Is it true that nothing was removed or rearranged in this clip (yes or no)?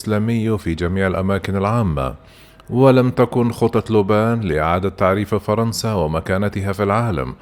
yes